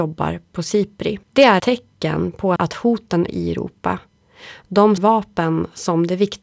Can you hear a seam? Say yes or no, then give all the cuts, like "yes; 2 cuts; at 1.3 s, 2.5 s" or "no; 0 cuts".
yes; 5 cuts; at 1.2 s, 1.6 s, 2.6 s, 3.3 s, 5.0 s